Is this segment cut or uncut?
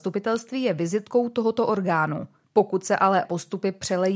cut